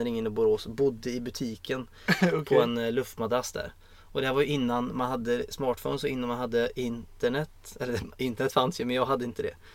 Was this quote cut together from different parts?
no; 0 cuts

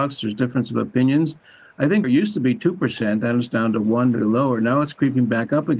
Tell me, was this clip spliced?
yes; 2 cuts; at 2.0 s, 4.1 s

